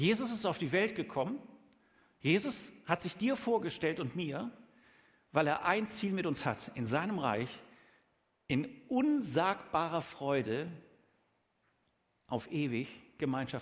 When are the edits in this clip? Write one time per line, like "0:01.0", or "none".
none